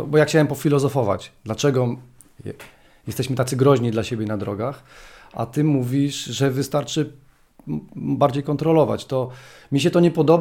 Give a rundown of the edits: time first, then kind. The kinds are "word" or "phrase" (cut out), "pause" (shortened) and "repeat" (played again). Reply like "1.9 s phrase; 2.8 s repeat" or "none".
none